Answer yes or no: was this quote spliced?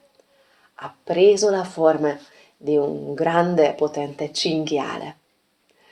no